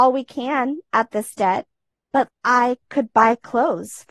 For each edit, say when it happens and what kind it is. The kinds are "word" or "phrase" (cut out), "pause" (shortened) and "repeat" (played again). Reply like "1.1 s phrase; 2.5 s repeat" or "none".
2.3 s word